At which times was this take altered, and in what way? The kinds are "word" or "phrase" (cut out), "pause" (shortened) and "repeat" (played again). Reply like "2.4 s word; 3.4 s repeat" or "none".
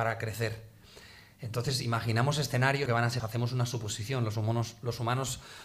2.9 s phrase; 3.2 s word